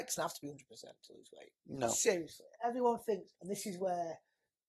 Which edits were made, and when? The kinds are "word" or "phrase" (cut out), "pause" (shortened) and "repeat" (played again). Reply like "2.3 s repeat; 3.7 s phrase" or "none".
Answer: 3.4 s pause